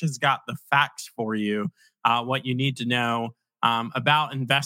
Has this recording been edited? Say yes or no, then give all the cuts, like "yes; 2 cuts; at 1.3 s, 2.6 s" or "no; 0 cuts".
no; 0 cuts